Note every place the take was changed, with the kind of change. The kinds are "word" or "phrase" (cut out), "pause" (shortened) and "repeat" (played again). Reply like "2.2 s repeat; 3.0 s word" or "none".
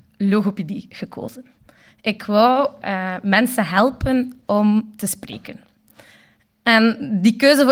none